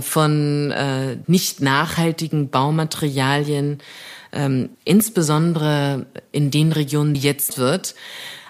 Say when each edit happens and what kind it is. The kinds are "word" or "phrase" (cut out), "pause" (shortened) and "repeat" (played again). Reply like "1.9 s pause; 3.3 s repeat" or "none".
1.2 s word; 4.7 s pause; 7.1 s phrase; 7.5 s phrase